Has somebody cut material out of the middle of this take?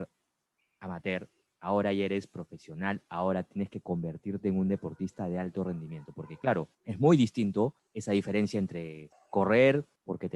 no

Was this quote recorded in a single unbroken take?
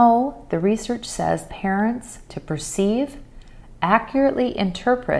no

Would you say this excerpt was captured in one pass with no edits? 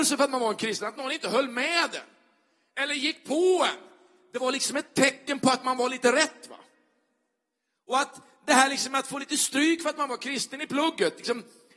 yes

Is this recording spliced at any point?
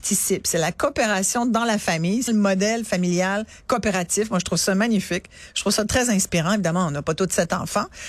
yes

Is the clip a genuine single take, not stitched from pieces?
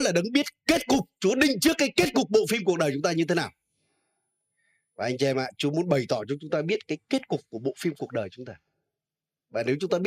yes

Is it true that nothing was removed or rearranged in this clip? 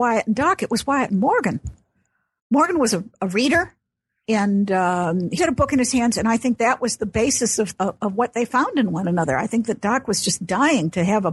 no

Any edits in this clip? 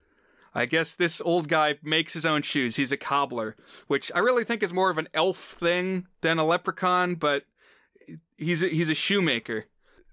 yes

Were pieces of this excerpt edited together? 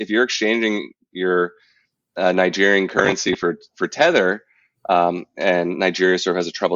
no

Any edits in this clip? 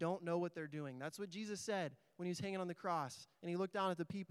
no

